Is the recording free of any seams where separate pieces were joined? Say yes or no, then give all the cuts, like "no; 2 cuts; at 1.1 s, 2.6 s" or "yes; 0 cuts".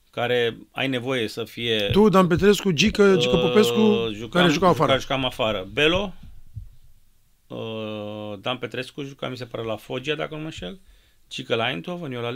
yes; 0 cuts